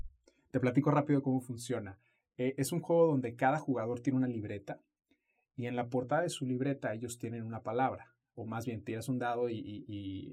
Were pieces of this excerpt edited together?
no; 0 cuts

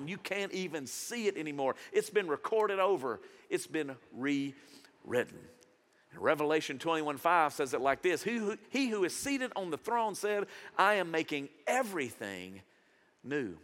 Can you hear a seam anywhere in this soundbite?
no; 0 cuts

